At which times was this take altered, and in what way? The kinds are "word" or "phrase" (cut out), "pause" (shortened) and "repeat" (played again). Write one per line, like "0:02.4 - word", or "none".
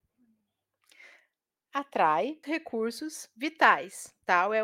0:02.4 - word